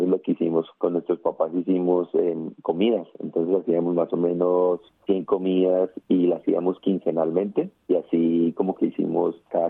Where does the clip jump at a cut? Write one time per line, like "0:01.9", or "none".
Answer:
none